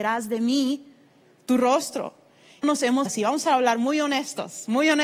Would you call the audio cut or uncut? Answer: cut